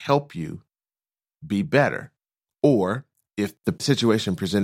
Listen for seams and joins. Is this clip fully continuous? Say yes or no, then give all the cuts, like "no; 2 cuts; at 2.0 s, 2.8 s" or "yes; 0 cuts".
yes; 0 cuts